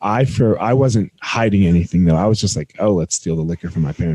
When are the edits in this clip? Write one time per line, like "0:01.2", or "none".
none